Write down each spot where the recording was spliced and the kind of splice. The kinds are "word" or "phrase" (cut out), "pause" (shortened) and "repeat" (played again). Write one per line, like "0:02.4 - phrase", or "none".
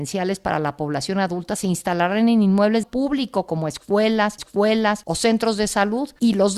0:02.8 - phrase
0:04.4 - repeat